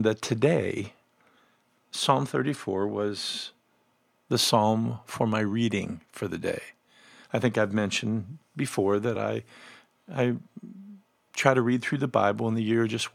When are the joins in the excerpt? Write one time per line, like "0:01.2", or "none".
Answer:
none

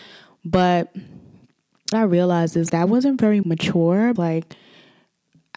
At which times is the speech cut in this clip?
0:01.9
0:02.7
0:03.4
0:04.2

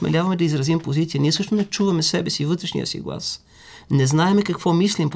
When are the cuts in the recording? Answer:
none

